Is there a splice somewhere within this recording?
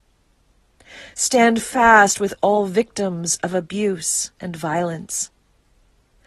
yes; 1 cut; at 4.3 s

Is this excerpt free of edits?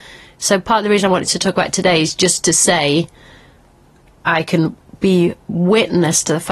yes; 0 cuts

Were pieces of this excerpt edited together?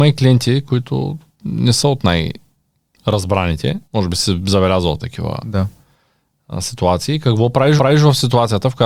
yes; 2 cuts; at 3.8 s, 7.8 s

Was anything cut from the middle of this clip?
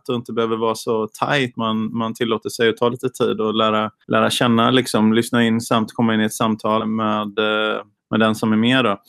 yes; 4 cuts; at 1.5 s, 4.0 s, 6.8 s, 8.0 s

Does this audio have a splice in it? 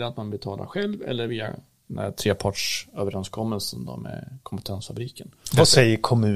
no; 0 cuts

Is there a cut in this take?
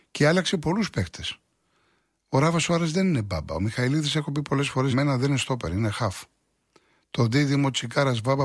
yes; 1 cut; at 4.9 s

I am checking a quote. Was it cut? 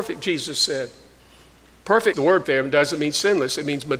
yes; 2 cuts; at 2.1 s, 2.4 s

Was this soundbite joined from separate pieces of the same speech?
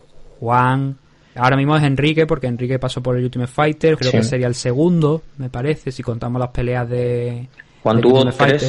yes; 2 cuts; at 1.4 s, 4.0 s

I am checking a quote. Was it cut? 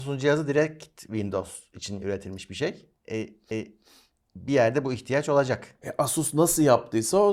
yes; 2 cuts; at 3.5 s, 5.8 s

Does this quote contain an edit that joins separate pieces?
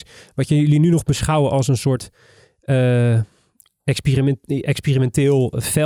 no; 0 cuts

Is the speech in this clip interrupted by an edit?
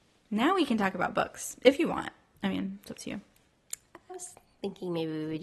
yes; 1 cut; at 4.1 s

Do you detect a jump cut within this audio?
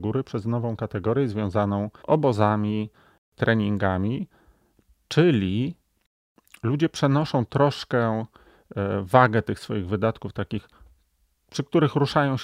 yes; 1 cut; at 2.0 s

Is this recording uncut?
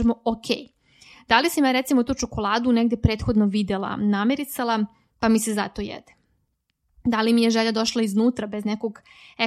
yes; 0 cuts

